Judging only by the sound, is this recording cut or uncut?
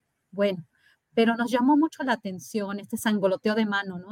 uncut